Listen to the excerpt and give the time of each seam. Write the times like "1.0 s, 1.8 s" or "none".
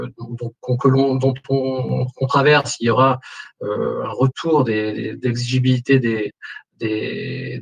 none